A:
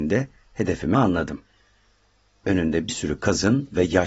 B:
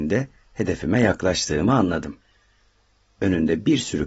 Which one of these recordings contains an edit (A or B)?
A